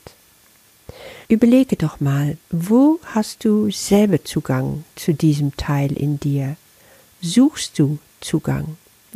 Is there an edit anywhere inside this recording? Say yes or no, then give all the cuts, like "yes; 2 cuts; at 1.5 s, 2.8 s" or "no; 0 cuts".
yes; 2 cuts; at 1.2 s, 2.4 s